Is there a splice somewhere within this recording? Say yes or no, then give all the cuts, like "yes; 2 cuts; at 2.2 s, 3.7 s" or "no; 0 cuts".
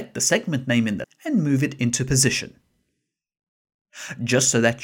yes; 1 cut; at 1.0 s